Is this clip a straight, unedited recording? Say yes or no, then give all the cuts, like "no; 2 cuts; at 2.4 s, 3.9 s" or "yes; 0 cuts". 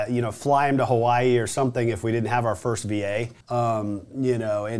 no; 1 cut; at 3.4 s